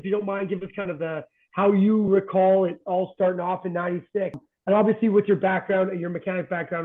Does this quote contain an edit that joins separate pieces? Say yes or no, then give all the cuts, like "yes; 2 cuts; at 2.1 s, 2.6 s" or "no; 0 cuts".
no; 0 cuts